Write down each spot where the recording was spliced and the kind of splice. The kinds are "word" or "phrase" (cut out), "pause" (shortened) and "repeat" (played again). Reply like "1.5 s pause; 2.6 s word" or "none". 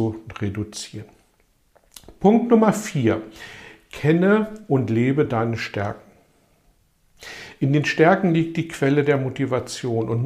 none